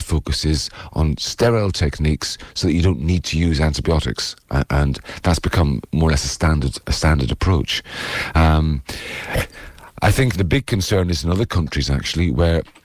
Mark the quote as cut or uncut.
cut